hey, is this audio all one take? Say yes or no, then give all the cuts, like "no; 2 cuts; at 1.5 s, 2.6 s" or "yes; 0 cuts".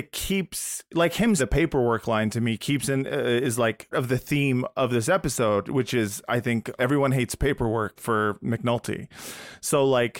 no; 4 cuts; at 1.4 s, 3.9 s, 6.8 s, 8.0 s